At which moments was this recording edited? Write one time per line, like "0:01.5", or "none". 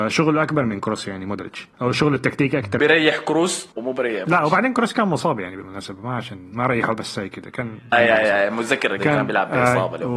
0:01.7
0:02.8
0:03.7
0:04.2
0:07.9
0:09.0